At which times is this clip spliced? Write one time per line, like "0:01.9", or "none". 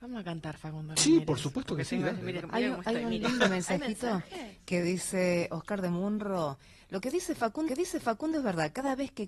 0:02.4
0:07.7